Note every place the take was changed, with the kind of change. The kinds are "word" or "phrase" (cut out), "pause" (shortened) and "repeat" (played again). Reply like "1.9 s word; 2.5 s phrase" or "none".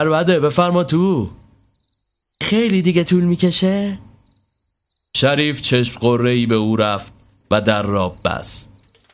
none